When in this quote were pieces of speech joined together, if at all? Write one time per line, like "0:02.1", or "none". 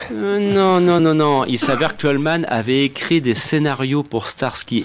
0:01.0
0:02.0